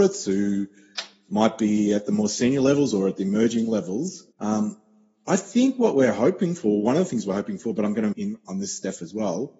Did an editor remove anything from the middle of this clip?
yes; 2 cuts; at 4.3 s, 8.1 s

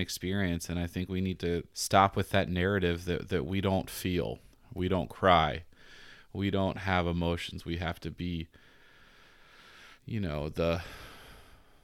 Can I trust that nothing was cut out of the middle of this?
no; 3 cuts; at 1.7 s, 4.5 s, 10.0 s

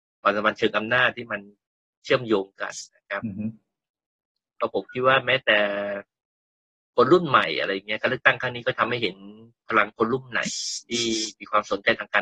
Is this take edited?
no; 0 cuts

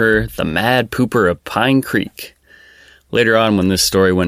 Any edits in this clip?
no; 0 cuts

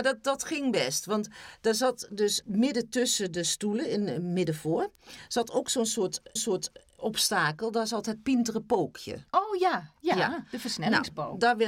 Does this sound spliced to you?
yes; 3 cuts; at 2.4 s, 6.4 s, 9.3 s

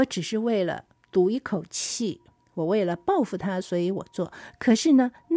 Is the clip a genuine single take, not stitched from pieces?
yes; 0 cuts

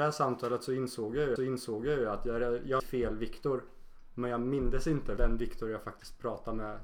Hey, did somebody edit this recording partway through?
yes; 3 cuts; at 1.4 s, 2.8 s, 5.2 s

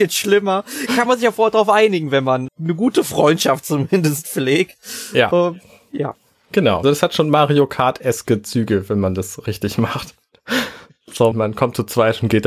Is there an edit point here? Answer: yes; 3 cuts; at 2.5 s, 6.8 s, 11.3 s

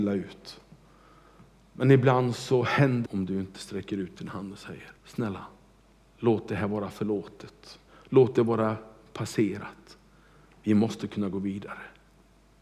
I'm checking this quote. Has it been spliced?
yes; 3 cuts; at 3.1 s, 5.0 s, 7.9 s

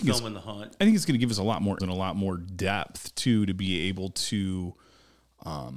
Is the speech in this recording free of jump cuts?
no; 1 cut; at 1.8 s

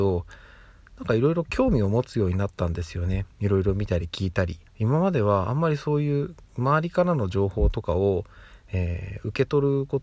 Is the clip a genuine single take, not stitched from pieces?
no; 2 cuts; at 3.3 s, 4.7 s

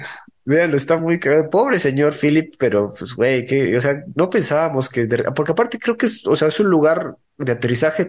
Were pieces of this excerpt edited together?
no; 0 cuts

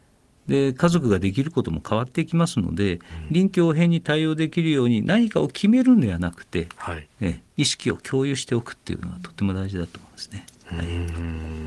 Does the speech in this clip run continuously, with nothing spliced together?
yes; 0 cuts

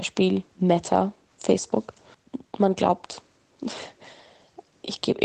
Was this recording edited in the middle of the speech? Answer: no; 0 cuts

